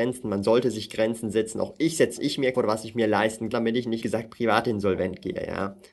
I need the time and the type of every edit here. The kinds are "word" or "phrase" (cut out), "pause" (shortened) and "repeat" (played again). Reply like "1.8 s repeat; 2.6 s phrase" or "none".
2.2 s phrase; 2.5 s word; 3.5 s word; 4.0 s phrase